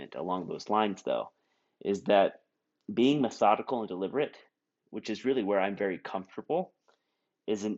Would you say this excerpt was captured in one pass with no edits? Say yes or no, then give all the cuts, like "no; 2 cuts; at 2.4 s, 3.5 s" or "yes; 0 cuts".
yes; 0 cuts